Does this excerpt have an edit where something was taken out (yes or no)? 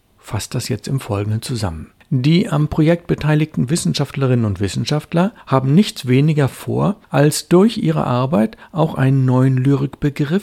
no